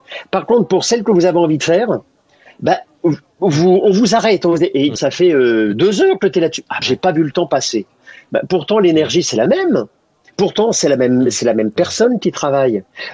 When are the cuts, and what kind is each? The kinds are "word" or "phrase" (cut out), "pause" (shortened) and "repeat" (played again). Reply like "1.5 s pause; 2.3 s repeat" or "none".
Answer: 5.0 s word; 6.8 s word